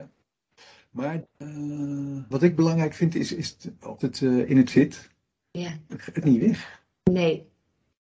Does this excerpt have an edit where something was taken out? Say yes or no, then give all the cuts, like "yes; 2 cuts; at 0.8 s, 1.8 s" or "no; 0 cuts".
yes; 6 cuts; at 1.2 s, 2.3 s, 3.5 s, 4.0 s, 4.7 s, 6.2 s